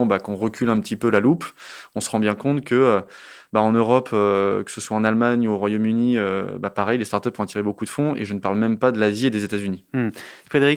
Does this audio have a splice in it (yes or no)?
no